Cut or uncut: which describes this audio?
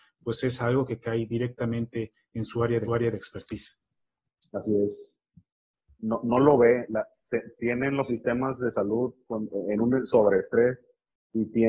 cut